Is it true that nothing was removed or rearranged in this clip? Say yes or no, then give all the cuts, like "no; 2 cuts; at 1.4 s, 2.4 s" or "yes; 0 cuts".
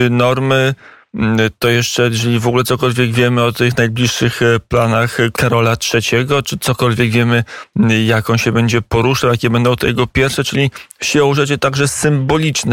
no; 1 cut; at 5.3 s